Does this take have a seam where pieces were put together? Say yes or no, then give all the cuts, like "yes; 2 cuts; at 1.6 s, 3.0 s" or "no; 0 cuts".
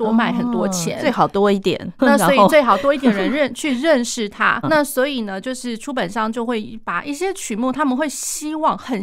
yes; 2 cuts; at 2.0 s, 4.6 s